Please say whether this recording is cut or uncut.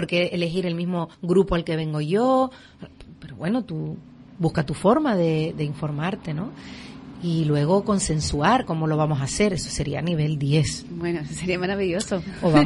cut